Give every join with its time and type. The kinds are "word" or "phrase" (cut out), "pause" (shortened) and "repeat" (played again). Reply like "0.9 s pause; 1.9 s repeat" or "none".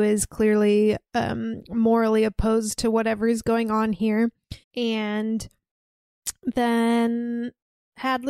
4.6 s pause